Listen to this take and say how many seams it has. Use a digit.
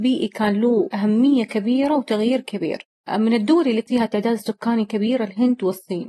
0